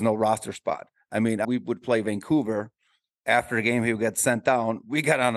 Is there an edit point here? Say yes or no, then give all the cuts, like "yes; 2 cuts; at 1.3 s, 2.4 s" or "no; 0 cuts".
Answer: yes; 1 cut; at 1.4 s